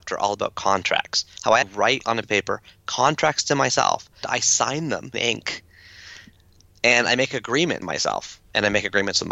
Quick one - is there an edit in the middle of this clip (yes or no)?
yes